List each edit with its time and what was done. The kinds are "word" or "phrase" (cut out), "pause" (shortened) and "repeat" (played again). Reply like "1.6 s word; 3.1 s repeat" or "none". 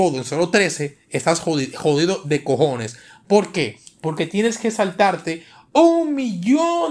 none

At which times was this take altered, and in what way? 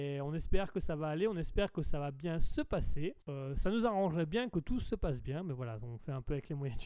3.2 s pause

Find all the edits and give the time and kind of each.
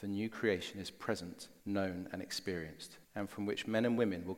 1.6 s pause; 3.0 s pause

